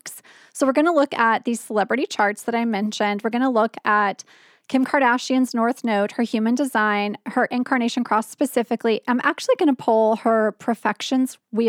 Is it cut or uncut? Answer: uncut